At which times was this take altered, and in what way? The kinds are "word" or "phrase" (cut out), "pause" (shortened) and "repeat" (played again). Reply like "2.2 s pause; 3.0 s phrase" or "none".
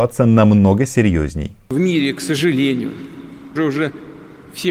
3.6 s word

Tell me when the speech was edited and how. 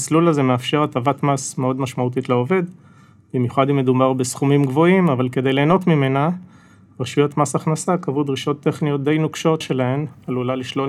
9.6 s word

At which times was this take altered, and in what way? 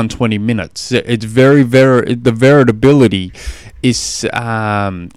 none

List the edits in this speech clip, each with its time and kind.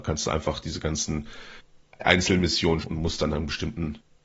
2.8 s word

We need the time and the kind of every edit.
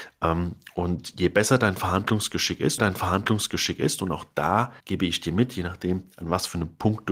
2.8 s repeat; 4.8 s pause

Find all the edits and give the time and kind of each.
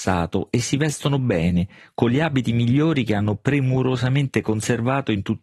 none

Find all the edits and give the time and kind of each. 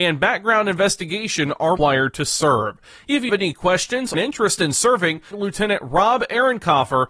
1.8 s word; 3.3 s word; 4.1 s word; 5.3 s word

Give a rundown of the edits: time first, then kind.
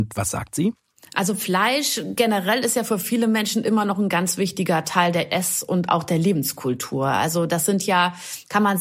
none

